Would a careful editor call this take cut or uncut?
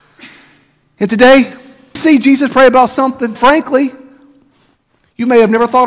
cut